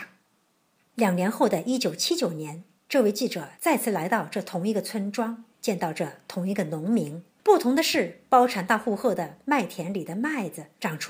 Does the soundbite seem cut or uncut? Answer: cut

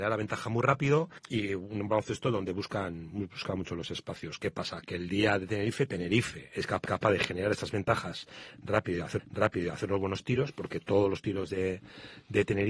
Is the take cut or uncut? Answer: cut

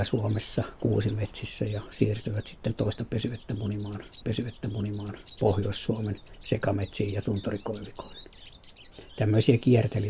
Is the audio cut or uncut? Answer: cut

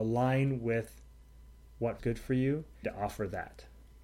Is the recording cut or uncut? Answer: cut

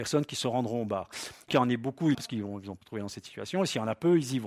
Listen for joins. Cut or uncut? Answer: cut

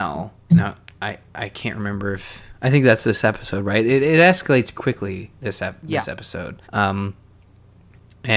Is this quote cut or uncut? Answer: cut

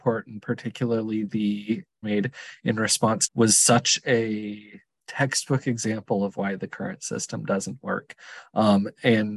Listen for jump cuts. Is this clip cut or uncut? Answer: cut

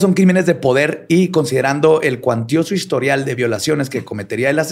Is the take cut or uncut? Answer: uncut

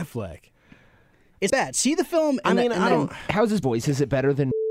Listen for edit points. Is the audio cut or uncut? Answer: cut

